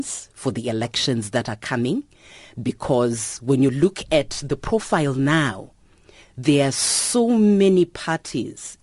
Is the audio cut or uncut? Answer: uncut